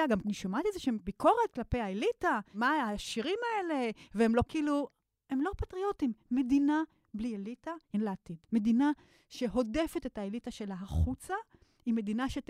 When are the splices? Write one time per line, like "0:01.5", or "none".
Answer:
0:04.5
0:07.9
0:08.4